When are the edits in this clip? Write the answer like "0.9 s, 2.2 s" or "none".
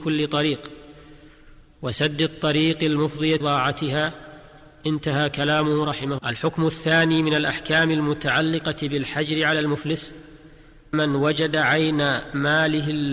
3.4 s, 6.2 s, 10.9 s